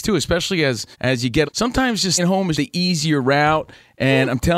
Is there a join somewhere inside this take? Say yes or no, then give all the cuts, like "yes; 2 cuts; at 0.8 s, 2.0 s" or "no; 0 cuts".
yes; 4 cuts; at 0.9 s, 1.4 s, 2.2 s, 2.5 s